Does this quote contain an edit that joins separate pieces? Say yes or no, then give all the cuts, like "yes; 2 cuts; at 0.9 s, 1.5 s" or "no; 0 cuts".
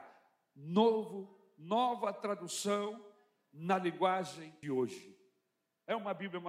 yes; 1 cut; at 4.6 s